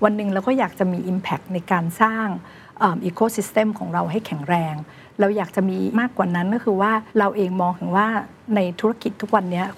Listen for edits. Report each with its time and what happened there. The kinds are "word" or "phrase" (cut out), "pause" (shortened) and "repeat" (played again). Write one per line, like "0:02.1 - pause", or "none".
0:05.9 - word
0:07.1 - pause